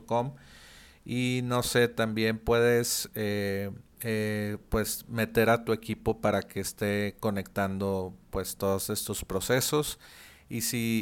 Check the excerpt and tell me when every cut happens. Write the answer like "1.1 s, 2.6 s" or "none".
3.9 s